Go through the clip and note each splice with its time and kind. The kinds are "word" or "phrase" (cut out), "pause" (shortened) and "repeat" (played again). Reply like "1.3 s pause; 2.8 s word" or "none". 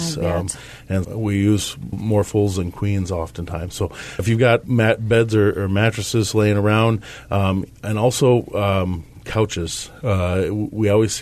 1.0 s word; 1.9 s word; 4.2 s word; 4.6 s word